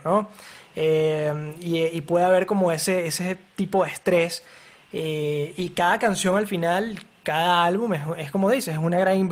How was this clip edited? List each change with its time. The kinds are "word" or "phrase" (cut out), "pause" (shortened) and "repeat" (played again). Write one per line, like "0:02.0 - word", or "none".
none